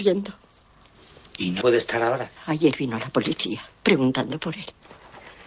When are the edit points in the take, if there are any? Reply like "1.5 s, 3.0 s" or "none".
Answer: 1.6 s, 2.4 s